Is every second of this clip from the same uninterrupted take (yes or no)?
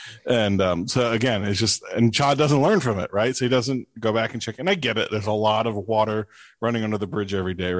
yes